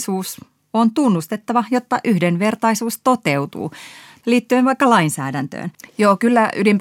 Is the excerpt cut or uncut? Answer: uncut